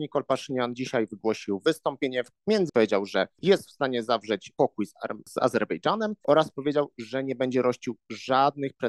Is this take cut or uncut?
cut